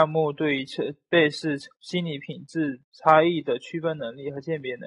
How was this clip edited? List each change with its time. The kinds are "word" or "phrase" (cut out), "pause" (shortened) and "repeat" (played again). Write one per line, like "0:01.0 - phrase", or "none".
0:01.7 - pause
0:02.8 - pause